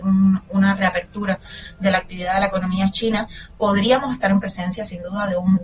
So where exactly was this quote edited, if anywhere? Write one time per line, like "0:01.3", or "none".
none